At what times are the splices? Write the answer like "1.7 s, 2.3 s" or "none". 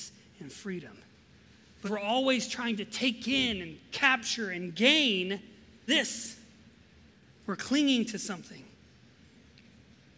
1.9 s, 5.9 s